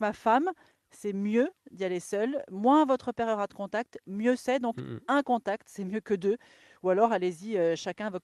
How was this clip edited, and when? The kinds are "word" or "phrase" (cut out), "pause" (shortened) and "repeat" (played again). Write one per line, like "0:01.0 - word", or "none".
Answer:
none